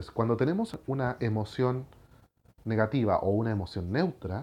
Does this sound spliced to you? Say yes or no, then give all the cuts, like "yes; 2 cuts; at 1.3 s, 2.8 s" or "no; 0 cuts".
no; 0 cuts